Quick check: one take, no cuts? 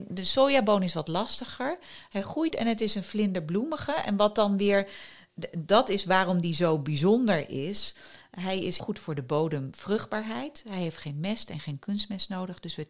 no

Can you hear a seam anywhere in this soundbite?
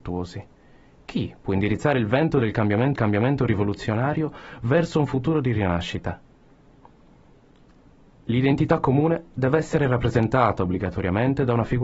yes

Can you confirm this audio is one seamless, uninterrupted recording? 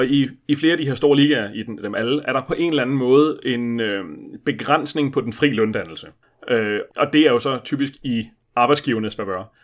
no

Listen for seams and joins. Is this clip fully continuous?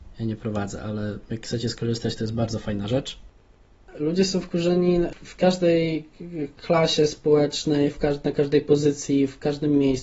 yes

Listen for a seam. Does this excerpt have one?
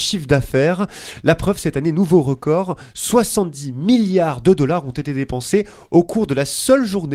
no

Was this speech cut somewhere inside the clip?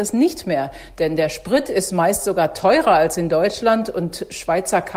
no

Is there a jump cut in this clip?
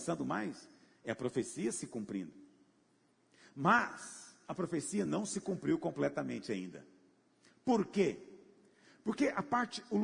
no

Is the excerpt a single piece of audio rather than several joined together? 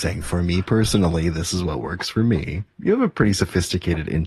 yes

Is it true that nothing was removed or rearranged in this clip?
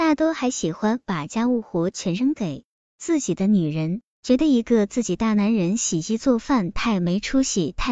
yes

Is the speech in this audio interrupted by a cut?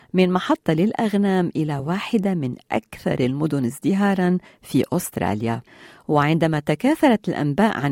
no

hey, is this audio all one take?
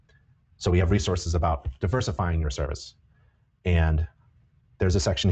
yes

